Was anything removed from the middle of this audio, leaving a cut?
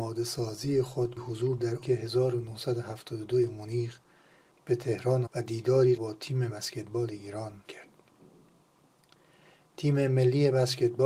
yes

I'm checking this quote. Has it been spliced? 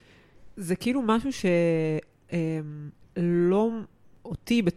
yes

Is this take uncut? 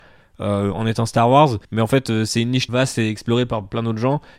no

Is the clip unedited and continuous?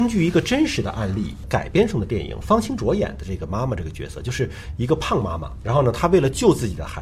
no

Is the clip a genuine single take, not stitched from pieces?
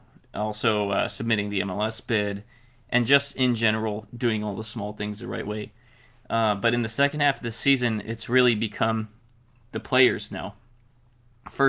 yes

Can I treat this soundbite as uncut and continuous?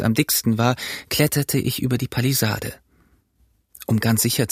yes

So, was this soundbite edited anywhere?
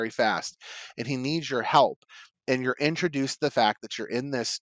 no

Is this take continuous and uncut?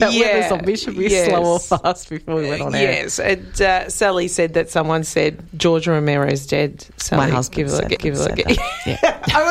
no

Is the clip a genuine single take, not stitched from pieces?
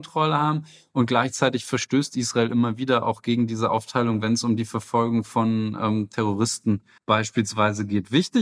no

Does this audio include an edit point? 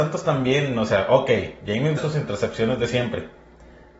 yes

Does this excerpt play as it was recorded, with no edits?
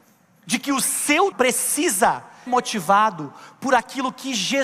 no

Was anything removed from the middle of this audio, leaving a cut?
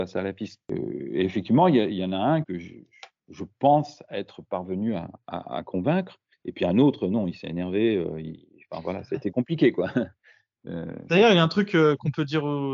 yes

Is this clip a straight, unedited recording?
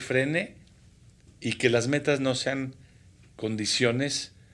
yes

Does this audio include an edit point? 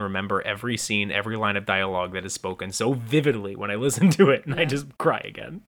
no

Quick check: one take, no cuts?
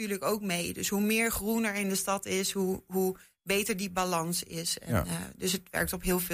yes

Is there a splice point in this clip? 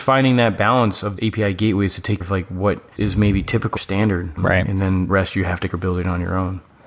yes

